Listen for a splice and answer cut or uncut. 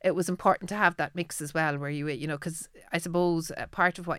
uncut